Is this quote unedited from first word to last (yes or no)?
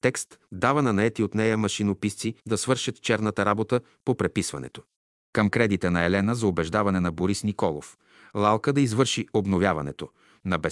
no